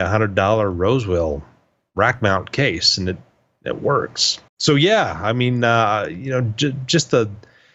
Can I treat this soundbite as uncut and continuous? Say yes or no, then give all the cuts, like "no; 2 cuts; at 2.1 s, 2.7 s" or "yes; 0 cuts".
no; 1 cut; at 4.5 s